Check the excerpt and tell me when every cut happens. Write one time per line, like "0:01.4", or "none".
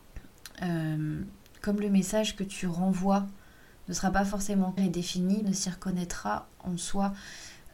0:04.8
0:05.4